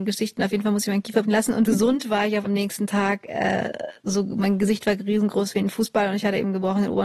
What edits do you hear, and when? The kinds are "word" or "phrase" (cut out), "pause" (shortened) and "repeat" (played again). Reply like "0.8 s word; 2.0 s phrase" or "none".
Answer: 1.2 s word; 1.7 s phrase; 2.5 s phrase